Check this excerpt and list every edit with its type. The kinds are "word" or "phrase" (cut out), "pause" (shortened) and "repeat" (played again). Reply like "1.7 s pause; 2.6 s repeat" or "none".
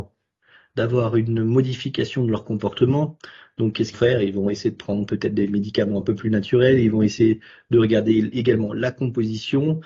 3.9 s phrase